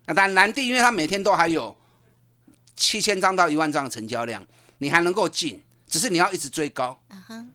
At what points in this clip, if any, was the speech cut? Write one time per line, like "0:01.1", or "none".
none

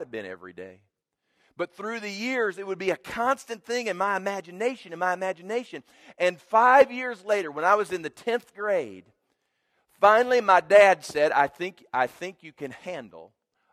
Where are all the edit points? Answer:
none

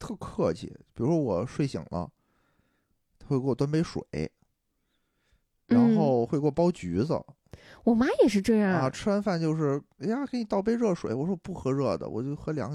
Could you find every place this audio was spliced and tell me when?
none

